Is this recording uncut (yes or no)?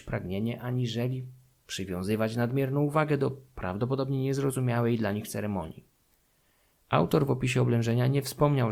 yes